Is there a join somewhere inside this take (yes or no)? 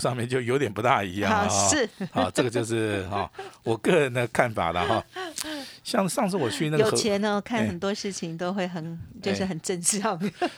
no